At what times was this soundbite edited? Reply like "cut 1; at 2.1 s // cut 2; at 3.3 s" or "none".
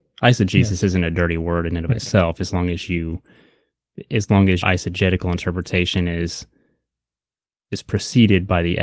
cut 1; at 4.6 s

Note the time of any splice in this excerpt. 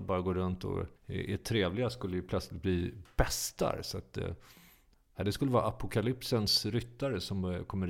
cut 1; at 1.0 s

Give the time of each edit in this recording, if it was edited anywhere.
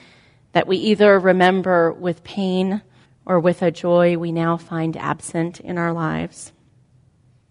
cut 1; at 3.1 s

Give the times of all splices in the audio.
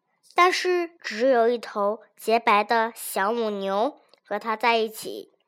cut 1; at 1.0 s

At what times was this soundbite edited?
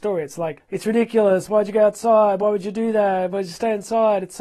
none

